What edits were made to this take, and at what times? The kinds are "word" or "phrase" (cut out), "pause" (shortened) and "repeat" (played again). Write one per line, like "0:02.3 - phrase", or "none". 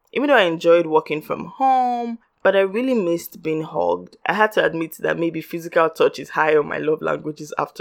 none